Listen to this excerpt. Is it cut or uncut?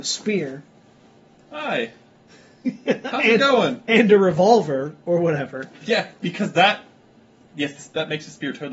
uncut